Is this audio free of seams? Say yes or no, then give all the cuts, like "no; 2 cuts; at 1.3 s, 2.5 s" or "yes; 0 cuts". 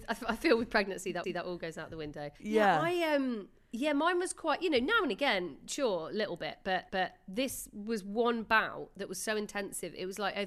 no; 3 cuts; at 1.2 s, 2.4 s, 6.9 s